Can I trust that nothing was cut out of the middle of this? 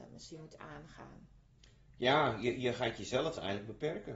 yes; 0 cuts

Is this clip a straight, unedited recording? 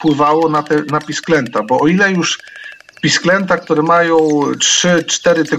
yes; 0 cuts

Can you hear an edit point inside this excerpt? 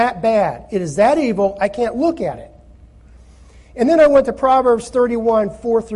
no; 0 cuts

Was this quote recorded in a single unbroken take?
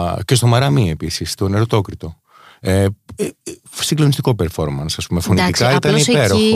yes; 0 cuts

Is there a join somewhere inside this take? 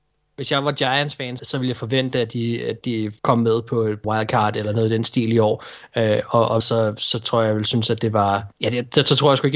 yes; 5 cuts; at 1.4 s, 3.2 s, 4.0 s, 6.6 s, 8.5 s

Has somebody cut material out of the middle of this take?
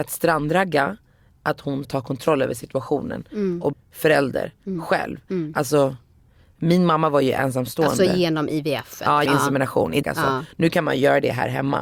yes; 4 cuts; at 1.8 s, 3.7 s, 9.3 s, 10.0 s

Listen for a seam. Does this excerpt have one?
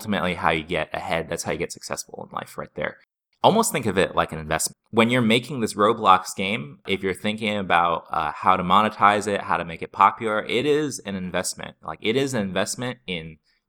no; 0 cuts

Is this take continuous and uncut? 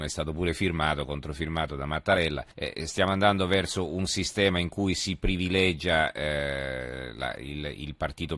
no; 1 cut; at 2.5 s

